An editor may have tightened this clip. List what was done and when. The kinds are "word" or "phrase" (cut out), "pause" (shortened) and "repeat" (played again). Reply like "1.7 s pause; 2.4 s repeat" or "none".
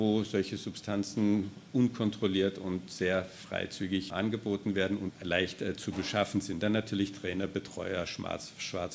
4.1 s word; 5.1 s phrase